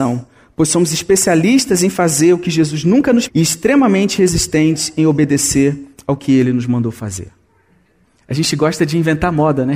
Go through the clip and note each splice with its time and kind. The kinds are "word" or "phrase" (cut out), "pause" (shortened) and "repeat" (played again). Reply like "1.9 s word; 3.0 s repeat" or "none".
3.3 s word